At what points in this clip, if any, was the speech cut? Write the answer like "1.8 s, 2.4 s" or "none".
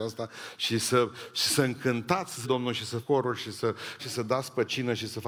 2.4 s, 3.0 s, 4.0 s